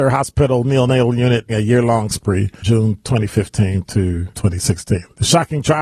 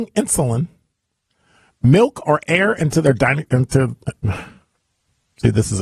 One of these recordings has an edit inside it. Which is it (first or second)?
first